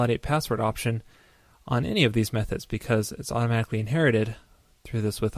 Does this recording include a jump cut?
no; 0 cuts

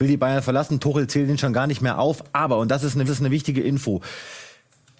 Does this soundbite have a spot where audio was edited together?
yes; 1 cut; at 3.0 s

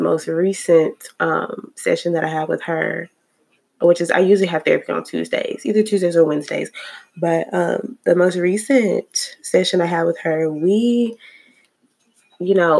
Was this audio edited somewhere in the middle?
no; 0 cuts

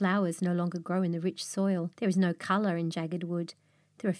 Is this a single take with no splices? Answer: no; 1 cut; at 1.9 s

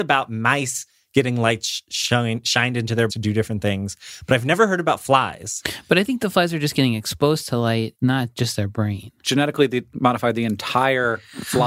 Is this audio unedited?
no; 2 cuts; at 3.1 s, 7.9 s

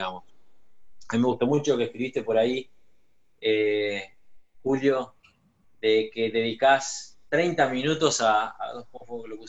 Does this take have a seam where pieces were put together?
yes; 1 cut; at 7.2 s

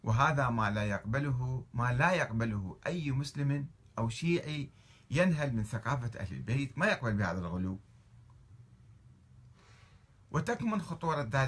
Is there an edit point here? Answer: no; 0 cuts

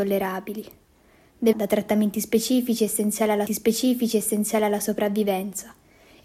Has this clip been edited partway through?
yes; 2 cuts; at 1.5 s, 3.5 s

